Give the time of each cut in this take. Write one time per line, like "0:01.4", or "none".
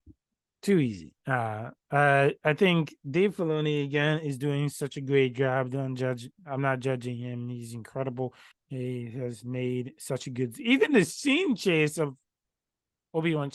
0:01.2
0:08.5